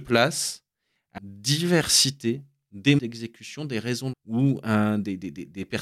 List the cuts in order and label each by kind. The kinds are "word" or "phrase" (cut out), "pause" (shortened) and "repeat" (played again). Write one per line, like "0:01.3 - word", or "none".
0:01.2 - word
0:03.0 - word
0:04.1 - word